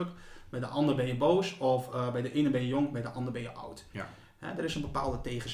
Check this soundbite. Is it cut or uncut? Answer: uncut